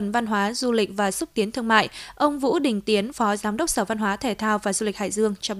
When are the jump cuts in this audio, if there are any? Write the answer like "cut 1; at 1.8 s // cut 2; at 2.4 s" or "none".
none